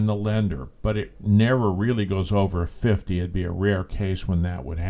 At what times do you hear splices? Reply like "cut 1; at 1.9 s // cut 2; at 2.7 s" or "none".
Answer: none

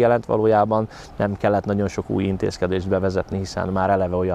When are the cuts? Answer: none

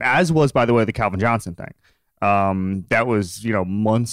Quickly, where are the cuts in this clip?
none

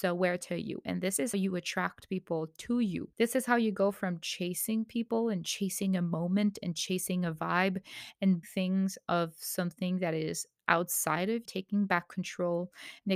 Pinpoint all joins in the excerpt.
cut 1; at 1.3 s // cut 2; at 3.1 s // cut 3; at 8.4 s // cut 4; at 11.5 s

